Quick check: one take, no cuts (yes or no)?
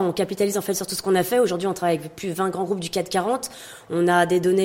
yes